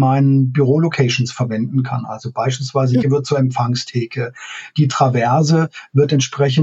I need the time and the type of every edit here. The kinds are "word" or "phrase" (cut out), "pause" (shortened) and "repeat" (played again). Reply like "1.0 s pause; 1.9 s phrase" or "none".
3.0 s word